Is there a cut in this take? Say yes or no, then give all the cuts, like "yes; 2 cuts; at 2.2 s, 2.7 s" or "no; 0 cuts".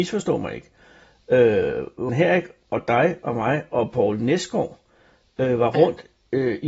yes; 1 cut; at 2.1 s